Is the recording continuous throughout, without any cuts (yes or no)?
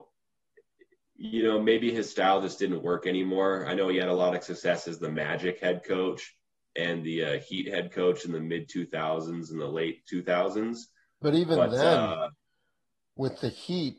yes